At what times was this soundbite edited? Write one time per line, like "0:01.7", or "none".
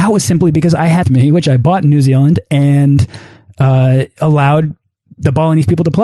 0:01.0